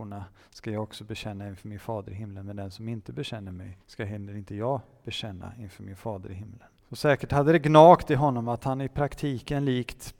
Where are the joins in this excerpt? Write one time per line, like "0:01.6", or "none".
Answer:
0:03.8
0:06.8